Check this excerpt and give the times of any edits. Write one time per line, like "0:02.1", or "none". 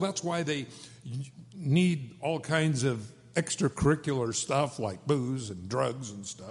0:01.5